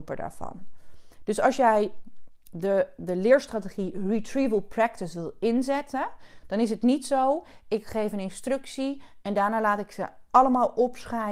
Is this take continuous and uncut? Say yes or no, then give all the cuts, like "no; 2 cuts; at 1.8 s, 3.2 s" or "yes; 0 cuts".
yes; 0 cuts